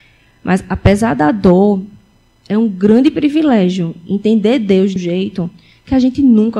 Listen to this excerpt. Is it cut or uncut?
cut